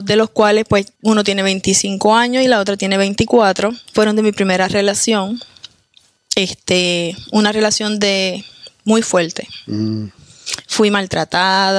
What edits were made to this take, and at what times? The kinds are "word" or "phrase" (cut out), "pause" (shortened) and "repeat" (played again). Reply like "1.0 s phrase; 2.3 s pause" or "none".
1.0 s pause